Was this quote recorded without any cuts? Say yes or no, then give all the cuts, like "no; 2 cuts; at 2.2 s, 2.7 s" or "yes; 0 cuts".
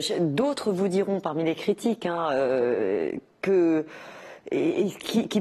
yes; 0 cuts